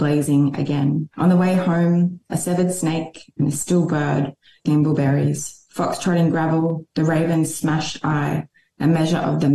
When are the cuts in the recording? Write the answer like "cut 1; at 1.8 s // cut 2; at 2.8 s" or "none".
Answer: cut 1; at 1.1 s // cut 2; at 4.7 s